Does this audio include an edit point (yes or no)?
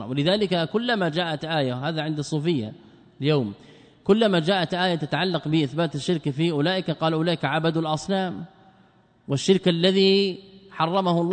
no